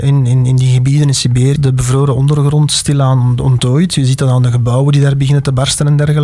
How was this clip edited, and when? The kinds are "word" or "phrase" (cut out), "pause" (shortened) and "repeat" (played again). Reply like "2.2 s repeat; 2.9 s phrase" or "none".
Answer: 1.6 s phrase